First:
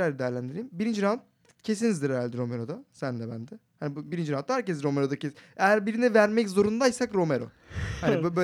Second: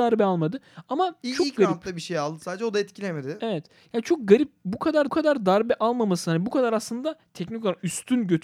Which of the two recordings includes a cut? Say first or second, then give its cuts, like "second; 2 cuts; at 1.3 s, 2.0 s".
second; 1 cut; at 5.1 s